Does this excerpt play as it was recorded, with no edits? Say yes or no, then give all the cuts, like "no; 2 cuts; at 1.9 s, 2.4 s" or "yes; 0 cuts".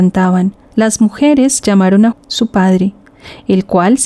no; 2 cuts; at 1.6 s, 2.1 s